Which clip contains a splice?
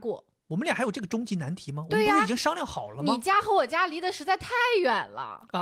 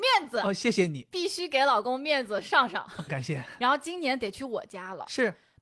second; 1 cut; at 3.1 s

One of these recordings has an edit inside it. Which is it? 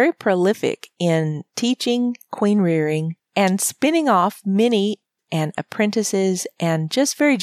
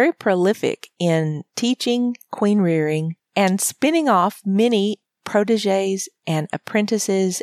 first; 1 cut; at 5.2 s

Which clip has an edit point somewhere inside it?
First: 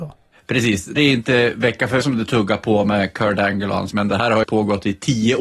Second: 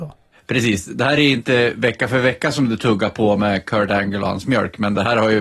first; 4 cuts; at 1.0 s, 2.0 s, 3.9 s, 4.4 s

